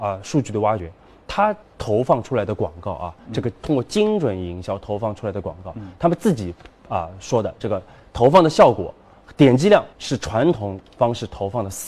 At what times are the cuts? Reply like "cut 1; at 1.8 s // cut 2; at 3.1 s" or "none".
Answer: cut 1; at 1.6 s // cut 2; at 9.9 s